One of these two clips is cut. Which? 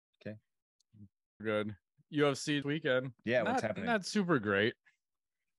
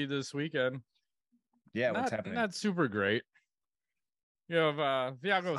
first; 3 cuts; at 1.4 s, 2.6 s, 3.2 s

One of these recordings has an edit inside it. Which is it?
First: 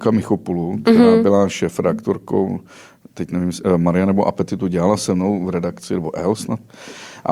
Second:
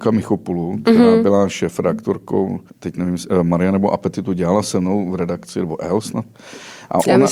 second; 1 cut; at 2.7 s

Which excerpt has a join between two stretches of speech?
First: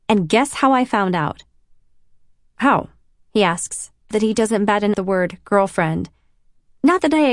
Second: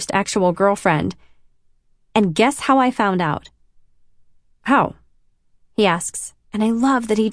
first; 3 cuts; at 3.2 s, 4.1 s, 4.9 s

